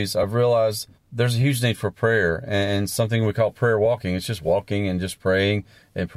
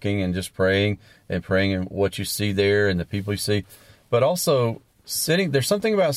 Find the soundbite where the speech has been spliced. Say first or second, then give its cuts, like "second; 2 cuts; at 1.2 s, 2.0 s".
first; 1 cut; at 0.9 s